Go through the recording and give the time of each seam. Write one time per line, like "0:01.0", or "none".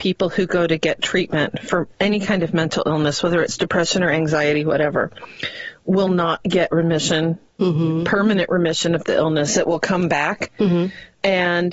none